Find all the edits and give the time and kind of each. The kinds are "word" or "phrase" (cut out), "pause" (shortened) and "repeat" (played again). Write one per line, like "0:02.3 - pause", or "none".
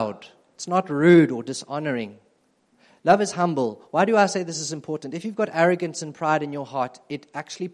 0:02.7 - pause